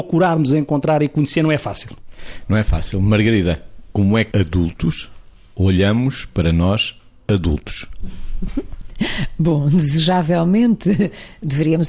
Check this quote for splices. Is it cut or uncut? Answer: cut